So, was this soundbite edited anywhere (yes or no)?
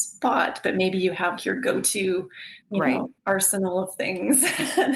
yes